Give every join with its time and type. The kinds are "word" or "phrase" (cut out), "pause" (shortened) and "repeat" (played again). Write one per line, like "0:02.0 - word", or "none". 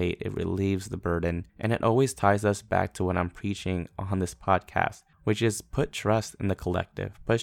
0:01.5 - pause
0:05.1 - pause